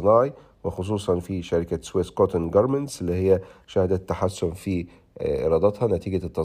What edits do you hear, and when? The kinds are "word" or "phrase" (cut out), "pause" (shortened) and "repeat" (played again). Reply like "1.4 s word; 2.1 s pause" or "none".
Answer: none